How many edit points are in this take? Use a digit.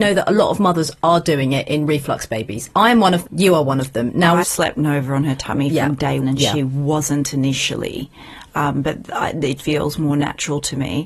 4